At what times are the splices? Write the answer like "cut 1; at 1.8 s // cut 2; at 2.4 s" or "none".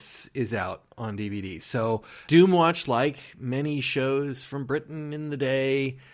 none